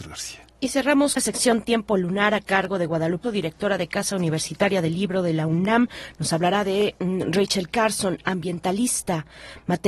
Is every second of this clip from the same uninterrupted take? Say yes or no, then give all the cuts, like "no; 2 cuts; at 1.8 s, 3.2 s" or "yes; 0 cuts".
no; 2 cuts; at 1.2 s, 3.2 s